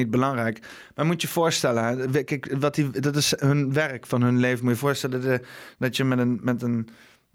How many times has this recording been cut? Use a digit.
0